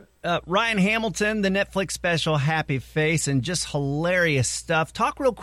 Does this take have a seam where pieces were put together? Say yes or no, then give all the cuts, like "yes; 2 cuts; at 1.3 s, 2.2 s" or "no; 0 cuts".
no; 0 cuts